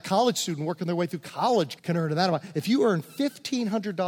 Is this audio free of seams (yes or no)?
no